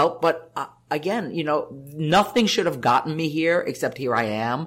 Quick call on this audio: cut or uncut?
uncut